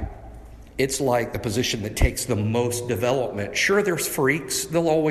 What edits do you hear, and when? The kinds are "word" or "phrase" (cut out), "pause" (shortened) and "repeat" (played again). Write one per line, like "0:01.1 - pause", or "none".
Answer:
none